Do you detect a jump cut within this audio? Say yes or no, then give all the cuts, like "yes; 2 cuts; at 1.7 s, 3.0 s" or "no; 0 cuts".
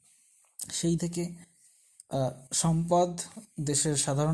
yes; 1 cut; at 1.0 s